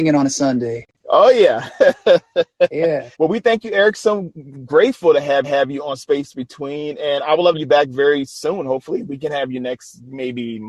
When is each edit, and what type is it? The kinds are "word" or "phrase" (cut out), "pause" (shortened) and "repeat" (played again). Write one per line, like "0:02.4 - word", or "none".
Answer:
0:03.1 - pause
0:05.4 - repeat
0:07.5 - phrase